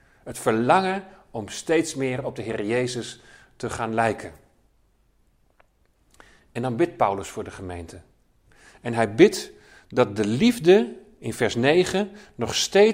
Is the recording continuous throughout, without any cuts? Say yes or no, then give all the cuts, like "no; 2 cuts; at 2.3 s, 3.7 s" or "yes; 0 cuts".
yes; 0 cuts